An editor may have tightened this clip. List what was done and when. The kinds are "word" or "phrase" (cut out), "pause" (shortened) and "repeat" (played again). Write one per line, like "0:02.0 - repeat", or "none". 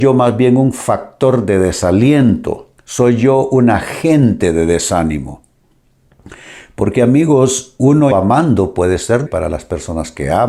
0:02.8 - pause
0:08.1 - word
0:09.3 - word